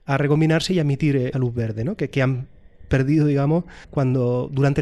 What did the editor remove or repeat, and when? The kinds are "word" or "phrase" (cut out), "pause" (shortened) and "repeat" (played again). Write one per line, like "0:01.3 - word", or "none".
0:01.3 - word
0:03.8 - pause